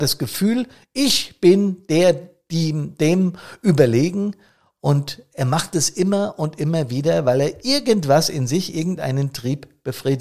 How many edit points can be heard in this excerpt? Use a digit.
0